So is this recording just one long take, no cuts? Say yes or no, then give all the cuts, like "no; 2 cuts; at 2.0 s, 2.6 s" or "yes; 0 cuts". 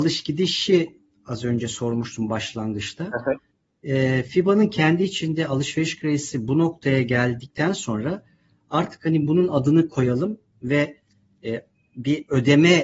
yes; 0 cuts